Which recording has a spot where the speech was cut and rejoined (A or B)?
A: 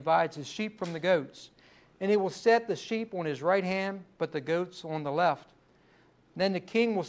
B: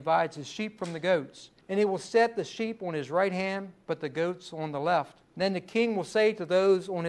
B